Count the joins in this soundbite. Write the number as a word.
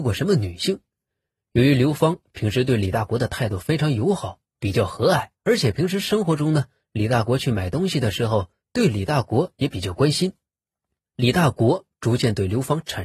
one